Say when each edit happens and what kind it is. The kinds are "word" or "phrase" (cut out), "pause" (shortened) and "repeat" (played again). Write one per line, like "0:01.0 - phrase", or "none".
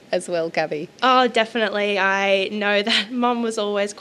none